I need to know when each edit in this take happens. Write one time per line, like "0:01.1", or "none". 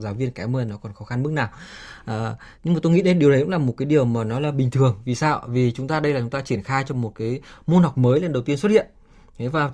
0:02.5